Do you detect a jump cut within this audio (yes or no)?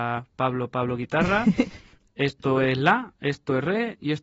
no